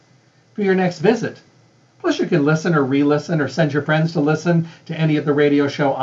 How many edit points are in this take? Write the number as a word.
zero